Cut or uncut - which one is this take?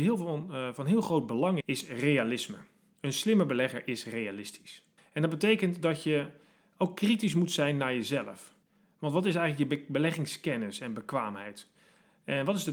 cut